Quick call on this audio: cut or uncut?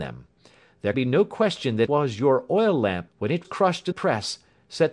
cut